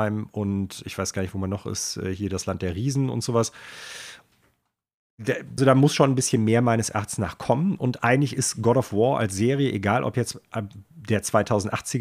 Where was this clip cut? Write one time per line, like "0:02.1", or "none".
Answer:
0:05.6